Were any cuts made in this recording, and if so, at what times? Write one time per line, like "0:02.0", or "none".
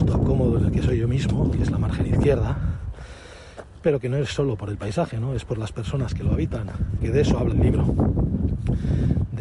0:07.0
0:07.5